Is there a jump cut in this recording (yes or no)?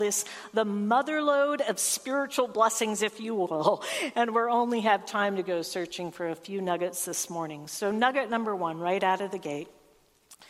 no